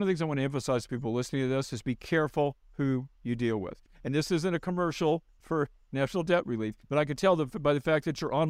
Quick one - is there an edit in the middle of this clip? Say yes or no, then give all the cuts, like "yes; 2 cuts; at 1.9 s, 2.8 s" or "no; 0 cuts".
yes; 1 cut; at 6.8 s